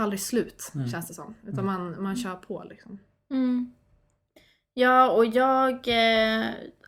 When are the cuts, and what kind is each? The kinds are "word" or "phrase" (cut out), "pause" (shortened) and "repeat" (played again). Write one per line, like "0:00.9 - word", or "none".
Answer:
none